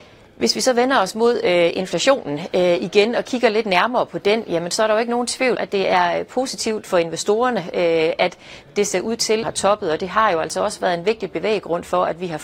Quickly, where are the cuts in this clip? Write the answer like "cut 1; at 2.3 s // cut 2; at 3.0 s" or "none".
cut 1; at 5.5 s // cut 2; at 9.4 s